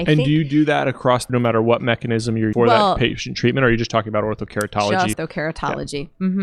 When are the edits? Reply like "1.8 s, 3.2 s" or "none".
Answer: 1.3 s, 2.5 s, 5.1 s